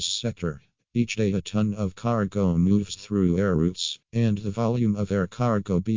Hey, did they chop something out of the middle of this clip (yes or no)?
yes